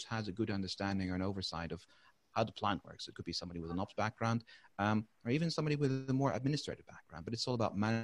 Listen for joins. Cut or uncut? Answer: uncut